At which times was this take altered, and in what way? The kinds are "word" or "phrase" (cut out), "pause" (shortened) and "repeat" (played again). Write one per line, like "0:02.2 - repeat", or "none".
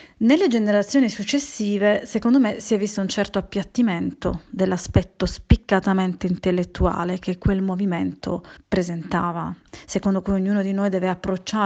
0:08.6 - pause